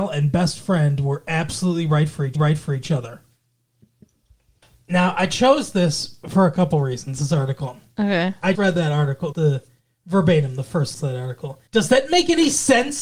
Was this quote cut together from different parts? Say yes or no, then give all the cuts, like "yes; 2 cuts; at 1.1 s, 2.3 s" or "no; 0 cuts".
yes; 5 cuts; at 2.3 s, 8.5 s, 9.3 s, 10.9 s, 11.7 s